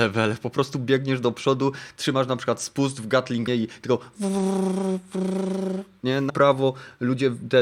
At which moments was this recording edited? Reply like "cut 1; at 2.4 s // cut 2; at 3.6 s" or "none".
cut 1; at 3.5 s // cut 2; at 6.3 s